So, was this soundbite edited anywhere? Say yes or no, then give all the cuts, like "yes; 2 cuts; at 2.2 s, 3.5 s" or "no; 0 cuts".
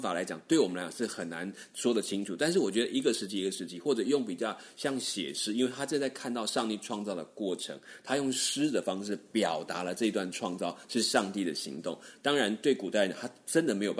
no; 0 cuts